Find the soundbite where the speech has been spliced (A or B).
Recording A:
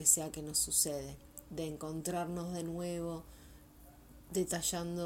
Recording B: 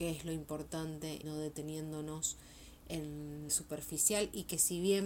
B